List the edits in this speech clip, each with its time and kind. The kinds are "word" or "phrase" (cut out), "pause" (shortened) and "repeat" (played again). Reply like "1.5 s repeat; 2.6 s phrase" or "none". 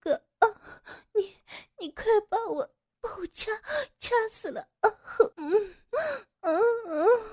5.3 s pause